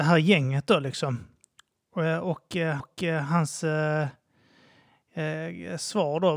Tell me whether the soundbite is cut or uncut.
cut